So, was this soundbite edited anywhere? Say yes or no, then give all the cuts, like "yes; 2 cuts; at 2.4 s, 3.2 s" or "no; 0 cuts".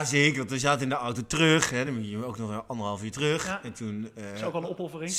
no; 0 cuts